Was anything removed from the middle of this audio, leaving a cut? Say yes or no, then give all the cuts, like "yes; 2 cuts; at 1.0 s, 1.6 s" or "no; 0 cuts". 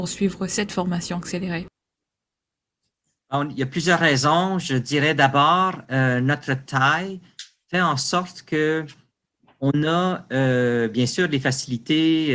no; 0 cuts